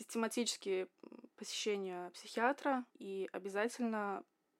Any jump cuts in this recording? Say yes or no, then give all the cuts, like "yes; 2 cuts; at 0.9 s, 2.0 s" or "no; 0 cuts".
yes; 1 cut; at 2.9 s